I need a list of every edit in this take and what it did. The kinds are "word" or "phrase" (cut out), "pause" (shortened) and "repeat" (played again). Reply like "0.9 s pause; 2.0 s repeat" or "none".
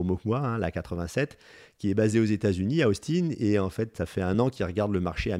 none